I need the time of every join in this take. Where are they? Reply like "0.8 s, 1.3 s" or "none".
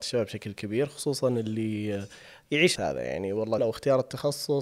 2.8 s, 3.6 s